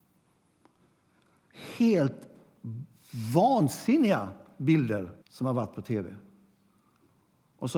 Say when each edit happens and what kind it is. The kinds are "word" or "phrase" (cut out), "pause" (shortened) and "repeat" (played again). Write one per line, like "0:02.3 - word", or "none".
0:05.2 - pause